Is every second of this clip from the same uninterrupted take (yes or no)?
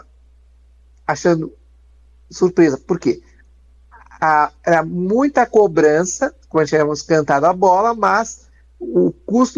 yes